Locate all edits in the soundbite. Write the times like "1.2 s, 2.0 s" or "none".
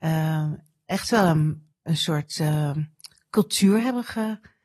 1.7 s